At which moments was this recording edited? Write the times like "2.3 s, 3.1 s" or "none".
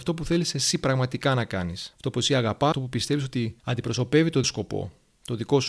1.9 s, 2.7 s, 3.6 s, 4.4 s